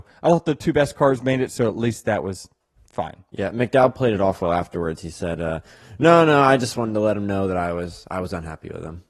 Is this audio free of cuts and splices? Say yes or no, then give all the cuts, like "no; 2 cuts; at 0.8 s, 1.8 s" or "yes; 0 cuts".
yes; 0 cuts